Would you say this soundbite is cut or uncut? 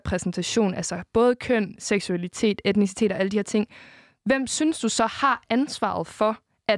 uncut